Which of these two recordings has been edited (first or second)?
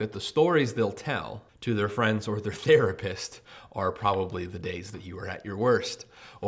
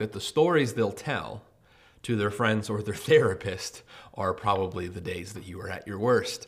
first